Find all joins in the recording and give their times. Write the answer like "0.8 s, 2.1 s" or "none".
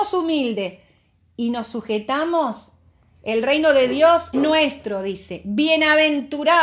4.3 s